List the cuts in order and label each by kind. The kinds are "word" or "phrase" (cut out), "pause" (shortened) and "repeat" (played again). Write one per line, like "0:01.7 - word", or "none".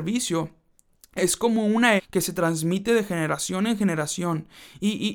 0:02.0 - word

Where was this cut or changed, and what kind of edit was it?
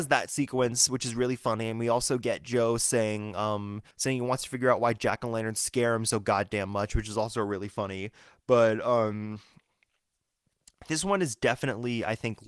0:03.9 - pause

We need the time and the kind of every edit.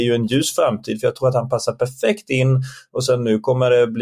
none

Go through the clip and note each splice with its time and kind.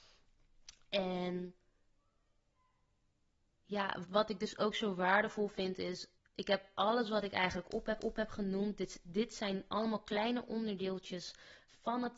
0:04.0 - word
0:06.2 - pause
0:08.0 - repeat

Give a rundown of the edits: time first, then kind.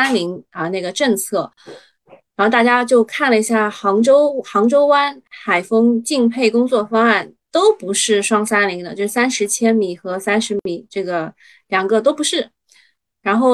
none

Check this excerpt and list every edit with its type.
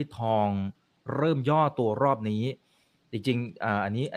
none

